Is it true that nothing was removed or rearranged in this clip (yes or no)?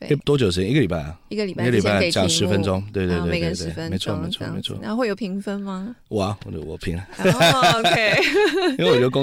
yes